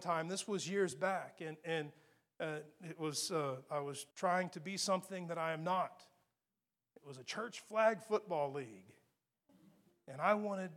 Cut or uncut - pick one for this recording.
cut